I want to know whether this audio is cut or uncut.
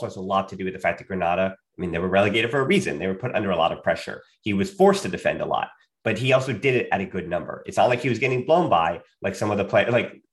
uncut